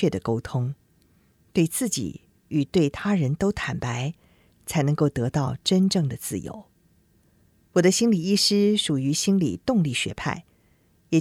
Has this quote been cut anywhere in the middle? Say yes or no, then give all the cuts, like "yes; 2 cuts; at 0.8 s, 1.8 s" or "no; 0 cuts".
no; 0 cuts